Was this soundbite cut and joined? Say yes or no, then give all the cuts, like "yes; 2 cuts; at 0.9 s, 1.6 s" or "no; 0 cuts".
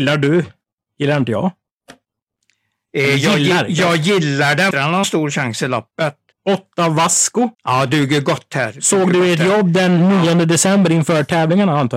yes; 4 cuts; at 4.7 s, 5.0 s, 6.3 s, 7.5 s